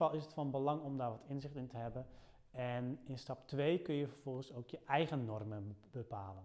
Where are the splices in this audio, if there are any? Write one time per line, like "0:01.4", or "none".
none